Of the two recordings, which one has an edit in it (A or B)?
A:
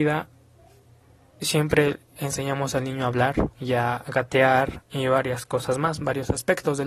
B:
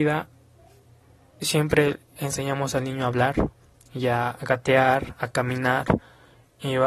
A